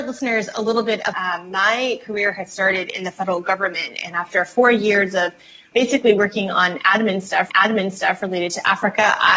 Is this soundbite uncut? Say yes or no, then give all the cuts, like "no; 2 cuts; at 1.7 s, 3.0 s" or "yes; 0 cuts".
no; 3 cuts; at 1.1 s, 5.7 s, 7.5 s